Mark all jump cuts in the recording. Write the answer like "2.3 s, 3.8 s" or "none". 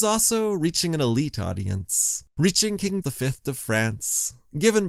2.3 s, 3.0 s